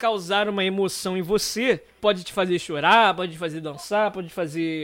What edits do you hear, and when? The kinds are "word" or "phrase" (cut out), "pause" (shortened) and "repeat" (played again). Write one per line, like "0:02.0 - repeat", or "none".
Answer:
0:02.0 - word